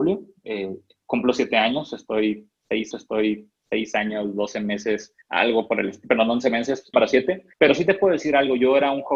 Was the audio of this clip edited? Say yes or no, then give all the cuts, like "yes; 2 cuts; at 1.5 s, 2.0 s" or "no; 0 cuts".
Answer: yes; 4 cuts; at 2.9 s, 5.2 s, 6.9 s, 7.5 s